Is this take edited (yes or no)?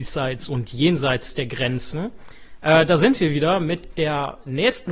no